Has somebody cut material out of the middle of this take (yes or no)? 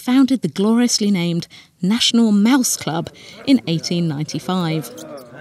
no